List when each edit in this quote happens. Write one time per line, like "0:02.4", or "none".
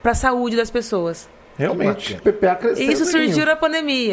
0:02.2